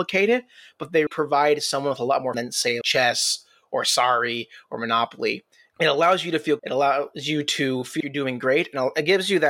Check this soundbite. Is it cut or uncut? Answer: cut